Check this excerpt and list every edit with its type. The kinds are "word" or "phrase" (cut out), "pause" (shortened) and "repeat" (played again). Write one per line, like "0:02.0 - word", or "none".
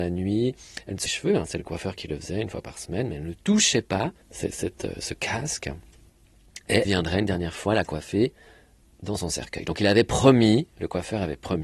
0:01.1 - phrase
0:04.2 - pause
0:06.8 - phrase